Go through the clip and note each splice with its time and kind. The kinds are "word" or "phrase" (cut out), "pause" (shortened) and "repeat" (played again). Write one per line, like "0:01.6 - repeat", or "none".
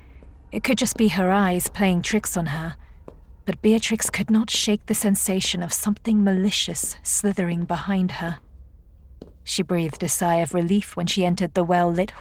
0:09.3 - pause